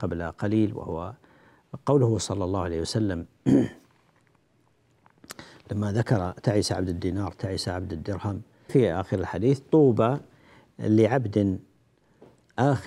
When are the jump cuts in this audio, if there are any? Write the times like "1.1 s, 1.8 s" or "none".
8.7 s